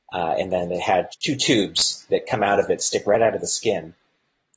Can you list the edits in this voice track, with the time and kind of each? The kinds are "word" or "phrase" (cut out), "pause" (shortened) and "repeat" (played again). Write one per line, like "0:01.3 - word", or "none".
0:01.1 - word

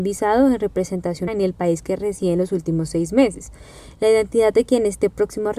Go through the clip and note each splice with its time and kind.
0:01.3 - word

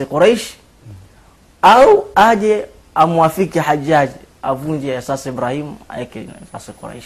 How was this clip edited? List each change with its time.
none

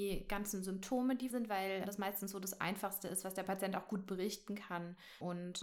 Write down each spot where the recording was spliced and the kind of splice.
0:01.3 - word
0:01.9 - word

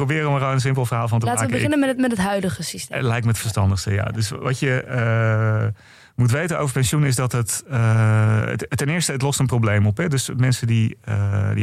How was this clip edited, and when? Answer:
none

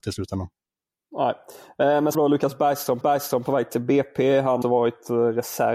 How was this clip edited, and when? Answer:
0:02.1 - word
0:03.0 - repeat
0:04.6 - word

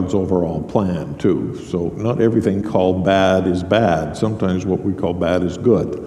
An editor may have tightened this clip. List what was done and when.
0:02.6 - word

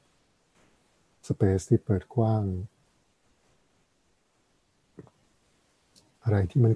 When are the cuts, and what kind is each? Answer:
none

